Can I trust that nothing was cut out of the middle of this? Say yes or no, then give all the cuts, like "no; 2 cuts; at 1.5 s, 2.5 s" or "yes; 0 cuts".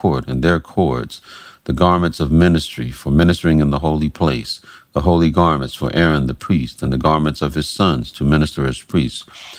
yes; 0 cuts